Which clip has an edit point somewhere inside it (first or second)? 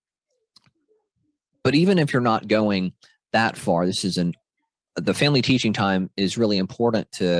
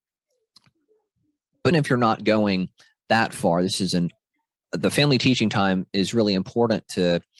second